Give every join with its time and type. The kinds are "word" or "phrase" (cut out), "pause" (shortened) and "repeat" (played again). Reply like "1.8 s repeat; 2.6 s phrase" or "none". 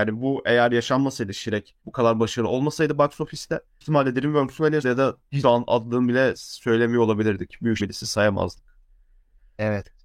1.8 s pause; 3.8 s word; 4.8 s phrase; 5.4 s word; 7.8 s word